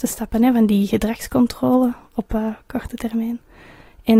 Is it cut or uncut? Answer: uncut